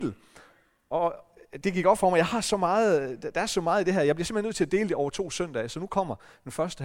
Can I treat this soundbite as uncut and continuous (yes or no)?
no